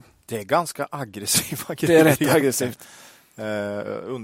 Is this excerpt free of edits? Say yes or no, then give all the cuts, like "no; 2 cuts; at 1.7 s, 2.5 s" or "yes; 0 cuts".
yes; 0 cuts